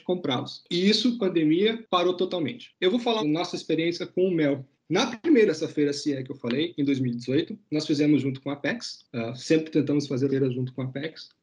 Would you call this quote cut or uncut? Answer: cut